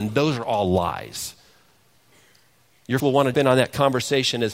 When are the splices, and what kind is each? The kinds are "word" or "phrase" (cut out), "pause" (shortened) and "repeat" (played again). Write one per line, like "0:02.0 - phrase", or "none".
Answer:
0:03.0 - word
0:03.3 - word

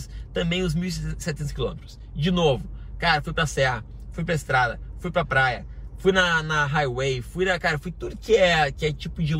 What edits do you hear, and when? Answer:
none

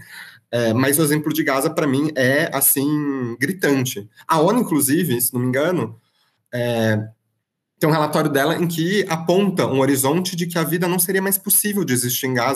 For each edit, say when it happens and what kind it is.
none

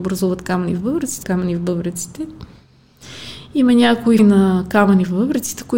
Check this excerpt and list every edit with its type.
0:01.2 - phrase
0:04.2 - word

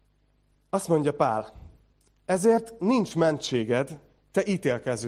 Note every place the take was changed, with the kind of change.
none

